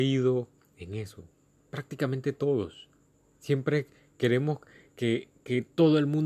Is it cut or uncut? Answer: cut